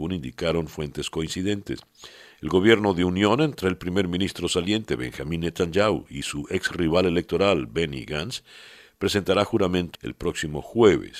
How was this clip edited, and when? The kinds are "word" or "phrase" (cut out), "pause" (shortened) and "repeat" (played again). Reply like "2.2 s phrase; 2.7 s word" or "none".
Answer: 9.9 s word